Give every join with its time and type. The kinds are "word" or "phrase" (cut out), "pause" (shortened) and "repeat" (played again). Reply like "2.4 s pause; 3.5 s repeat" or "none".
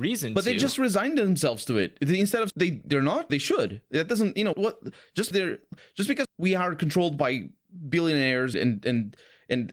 2.5 s word; 3.3 s word; 4.5 s word; 5.3 s word; 6.2 s word; 8.5 s word